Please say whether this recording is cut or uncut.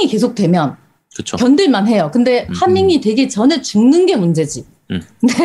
uncut